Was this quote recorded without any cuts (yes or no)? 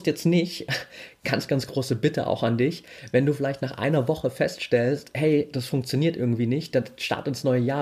yes